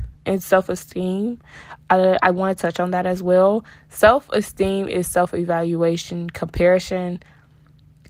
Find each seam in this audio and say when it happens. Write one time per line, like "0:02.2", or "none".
none